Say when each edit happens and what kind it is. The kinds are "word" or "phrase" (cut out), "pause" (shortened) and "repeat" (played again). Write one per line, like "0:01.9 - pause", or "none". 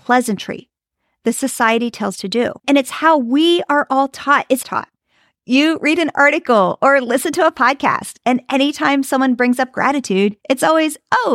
0:02.2 - word
0:02.6 - pause
0:04.6 - phrase
0:10.4 - pause